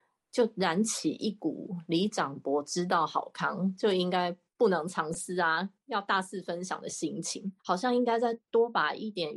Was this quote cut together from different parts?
yes; 1 cut; at 7.6 s

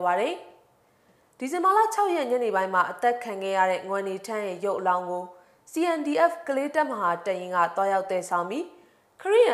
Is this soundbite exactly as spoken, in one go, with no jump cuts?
yes; 0 cuts

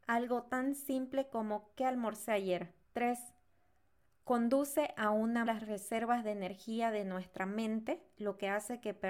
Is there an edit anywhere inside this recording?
yes; 2 cuts; at 2.8 s, 5.5 s

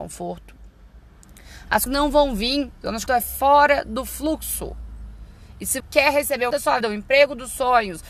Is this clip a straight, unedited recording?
no; 5 cuts; at 1.9 s, 3.1 s, 5.8 s, 6.5 s, 6.8 s

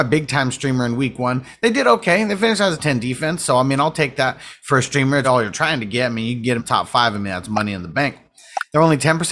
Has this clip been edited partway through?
yes; 3 cuts; at 2.8 s, 5.2 s, 6.6 s

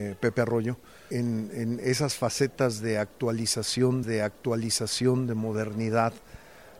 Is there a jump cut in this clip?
yes; 2 cuts; at 1.1 s, 4.0 s

